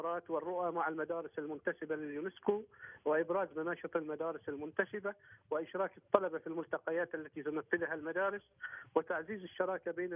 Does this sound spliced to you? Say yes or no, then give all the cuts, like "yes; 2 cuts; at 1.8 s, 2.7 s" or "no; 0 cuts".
no; 0 cuts